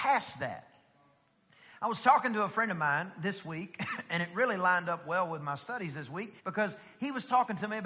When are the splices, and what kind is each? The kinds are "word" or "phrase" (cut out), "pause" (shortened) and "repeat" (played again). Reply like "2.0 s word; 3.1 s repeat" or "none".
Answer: 6.4 s pause